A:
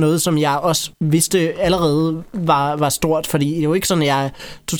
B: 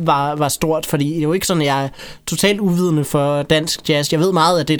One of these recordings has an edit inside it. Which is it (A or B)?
A